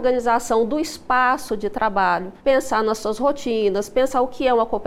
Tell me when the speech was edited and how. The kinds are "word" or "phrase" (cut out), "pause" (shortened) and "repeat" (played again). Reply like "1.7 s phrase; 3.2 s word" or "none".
2.4 s pause